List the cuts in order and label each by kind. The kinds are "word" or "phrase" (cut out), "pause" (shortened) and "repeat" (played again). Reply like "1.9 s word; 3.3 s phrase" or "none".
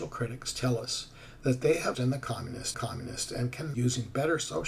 1.9 s phrase; 2.7 s repeat; 3.7 s word